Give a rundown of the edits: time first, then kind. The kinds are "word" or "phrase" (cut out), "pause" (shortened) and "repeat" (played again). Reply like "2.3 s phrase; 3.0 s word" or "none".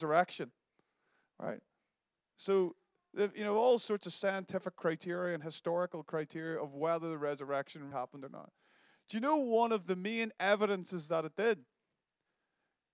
7.9 s word